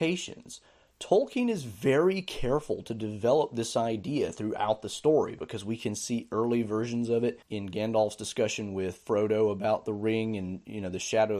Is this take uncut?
no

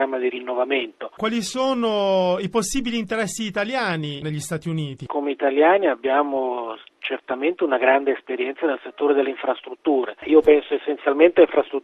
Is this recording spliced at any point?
no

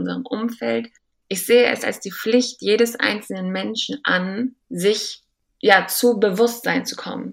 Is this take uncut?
no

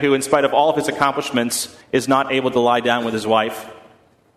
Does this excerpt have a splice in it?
yes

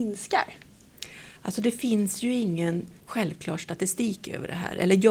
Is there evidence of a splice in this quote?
yes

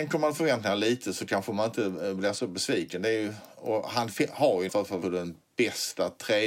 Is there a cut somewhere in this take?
yes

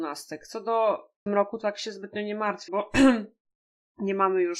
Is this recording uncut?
no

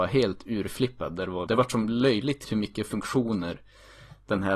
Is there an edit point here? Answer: yes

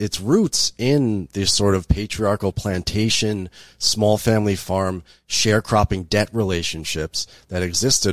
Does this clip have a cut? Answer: no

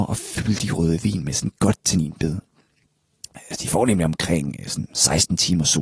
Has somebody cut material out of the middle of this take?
no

